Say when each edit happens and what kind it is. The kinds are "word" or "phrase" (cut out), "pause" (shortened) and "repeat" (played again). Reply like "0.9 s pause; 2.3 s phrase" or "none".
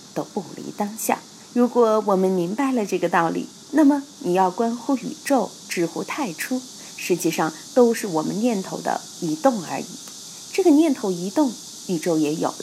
1.4 s pause

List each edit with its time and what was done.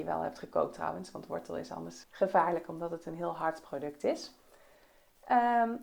2.0 s word

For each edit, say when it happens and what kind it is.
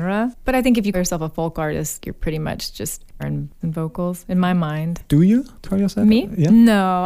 0.9 s word; 2.0 s word; 3.2 s word; 3.6 s word; 5.6 s word

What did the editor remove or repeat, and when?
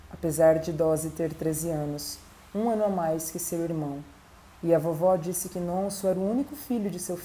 none

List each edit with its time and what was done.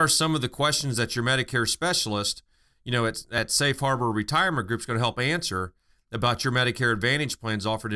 none

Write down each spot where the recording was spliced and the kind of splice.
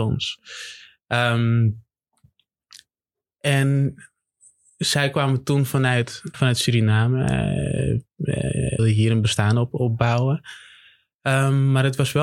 6.3 s word; 8.8 s word

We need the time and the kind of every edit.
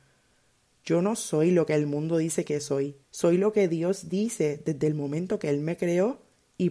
3.0 s pause

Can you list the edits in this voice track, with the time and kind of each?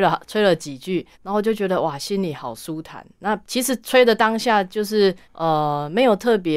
1.1 s pause; 3.4 s pause; 5.2 s pause

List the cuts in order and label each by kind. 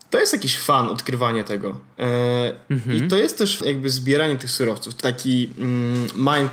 1.9 s pause; 3.6 s word; 5.0 s word

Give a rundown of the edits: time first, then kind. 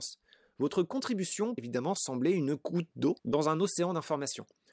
1.6 s word; 3.2 s pause

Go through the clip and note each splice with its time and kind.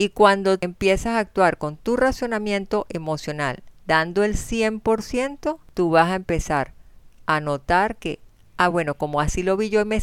none

